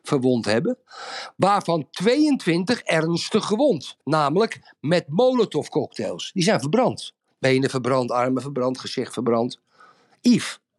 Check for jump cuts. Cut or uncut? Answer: cut